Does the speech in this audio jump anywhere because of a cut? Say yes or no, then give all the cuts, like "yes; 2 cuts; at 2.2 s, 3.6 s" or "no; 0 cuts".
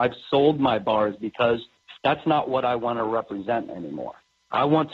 yes; 1 cut; at 2.0 s